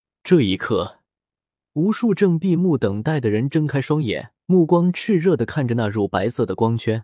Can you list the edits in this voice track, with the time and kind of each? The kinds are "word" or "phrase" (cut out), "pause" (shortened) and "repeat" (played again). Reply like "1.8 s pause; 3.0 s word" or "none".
4.4 s pause